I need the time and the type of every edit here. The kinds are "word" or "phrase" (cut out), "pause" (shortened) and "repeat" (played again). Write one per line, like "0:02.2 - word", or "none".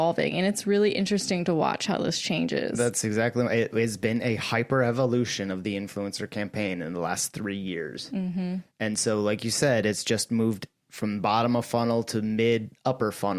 0:08.7 - pause